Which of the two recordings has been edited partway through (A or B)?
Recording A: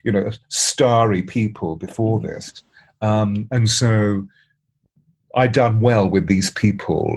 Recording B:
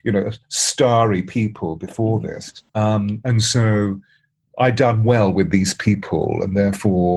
B